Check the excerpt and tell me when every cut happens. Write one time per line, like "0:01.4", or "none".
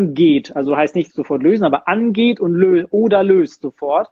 none